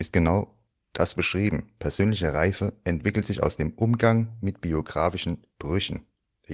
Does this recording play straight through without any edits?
yes; 0 cuts

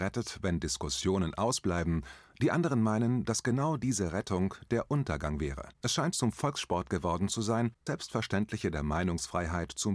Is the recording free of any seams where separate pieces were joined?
no; 2 cuts; at 5.7 s, 7.9 s

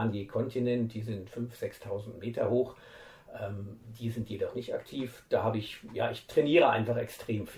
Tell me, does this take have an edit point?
no; 0 cuts

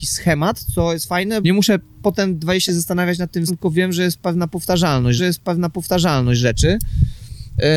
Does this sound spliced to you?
yes; 4 cuts; at 1.4 s, 2.7 s, 3.5 s, 5.2 s

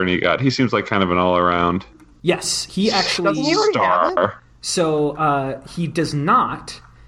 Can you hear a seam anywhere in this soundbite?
no; 0 cuts

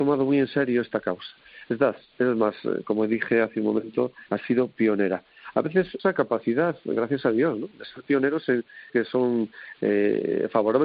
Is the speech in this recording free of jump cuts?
no; 3 cuts; at 4.3 s, 6.0 s, 8.9 s

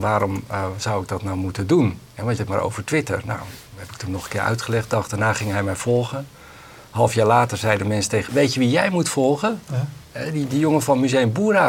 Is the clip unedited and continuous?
no; 3 cuts; at 2.0 s, 2.4 s, 8.3 s

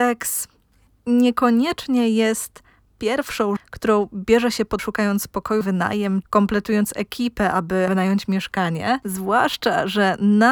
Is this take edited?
yes; 5 cuts; at 3.6 s, 4.8 s, 5.6 s, 6.2 s, 7.9 s

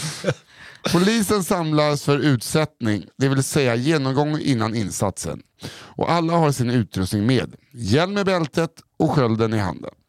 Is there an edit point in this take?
no; 0 cuts

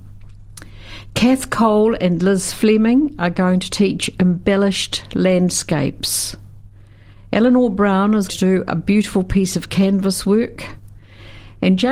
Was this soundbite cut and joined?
yes; 1 cut; at 8.3 s

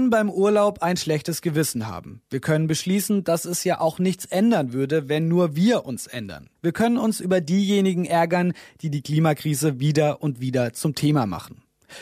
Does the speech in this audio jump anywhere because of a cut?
no; 0 cuts

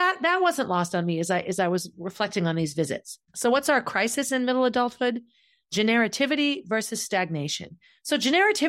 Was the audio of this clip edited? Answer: yes; 1 cut; at 3.3 s

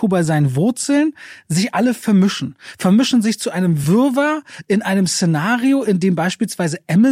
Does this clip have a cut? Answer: no; 0 cuts

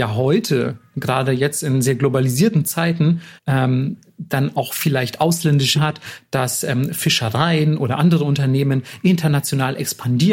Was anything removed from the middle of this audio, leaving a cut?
yes; 2 cuts; at 3.4 s, 5.7 s

